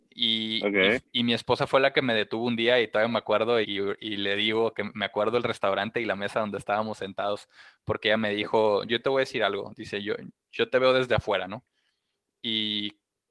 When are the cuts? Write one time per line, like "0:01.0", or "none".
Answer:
0:01.1
0:03.6